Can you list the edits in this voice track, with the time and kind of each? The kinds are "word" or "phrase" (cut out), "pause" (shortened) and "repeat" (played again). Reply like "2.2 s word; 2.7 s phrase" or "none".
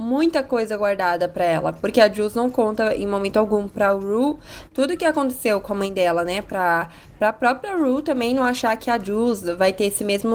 none